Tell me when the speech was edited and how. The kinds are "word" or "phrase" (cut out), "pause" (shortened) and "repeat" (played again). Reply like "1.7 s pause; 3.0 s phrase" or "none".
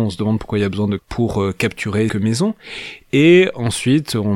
1.0 s phrase; 2.1 s phrase